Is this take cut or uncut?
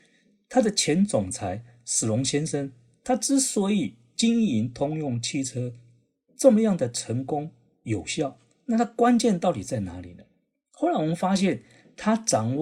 uncut